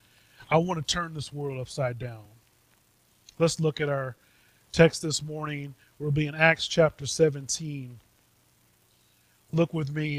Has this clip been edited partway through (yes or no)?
no